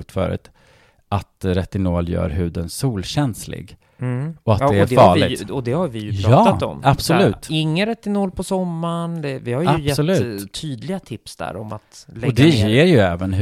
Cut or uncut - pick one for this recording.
uncut